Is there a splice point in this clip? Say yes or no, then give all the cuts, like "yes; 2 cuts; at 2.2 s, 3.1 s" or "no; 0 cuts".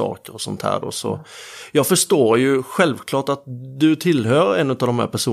no; 0 cuts